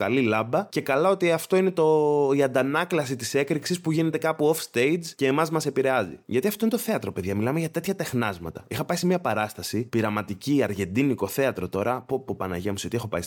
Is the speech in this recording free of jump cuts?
yes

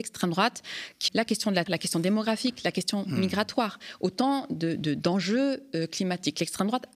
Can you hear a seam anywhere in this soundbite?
yes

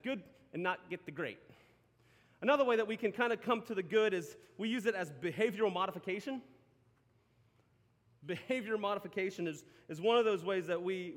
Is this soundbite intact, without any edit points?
yes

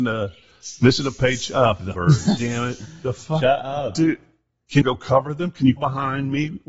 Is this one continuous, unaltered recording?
no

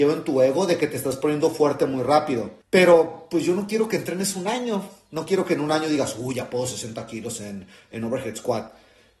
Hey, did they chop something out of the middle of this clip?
yes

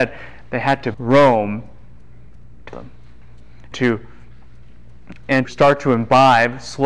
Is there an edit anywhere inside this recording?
yes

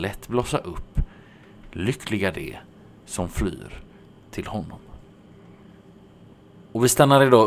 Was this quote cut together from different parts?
no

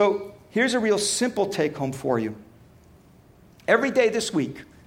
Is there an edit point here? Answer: no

